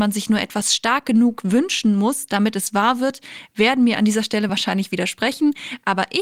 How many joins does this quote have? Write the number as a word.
zero